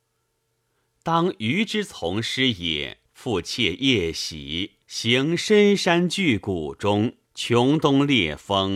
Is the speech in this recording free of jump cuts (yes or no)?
no